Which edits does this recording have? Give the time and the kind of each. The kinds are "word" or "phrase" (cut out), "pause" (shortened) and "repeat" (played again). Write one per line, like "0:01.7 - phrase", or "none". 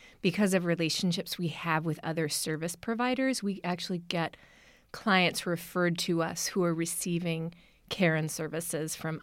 none